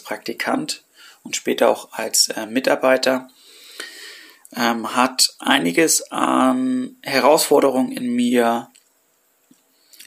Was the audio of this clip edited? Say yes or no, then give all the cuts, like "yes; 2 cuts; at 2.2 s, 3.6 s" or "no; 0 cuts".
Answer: no; 0 cuts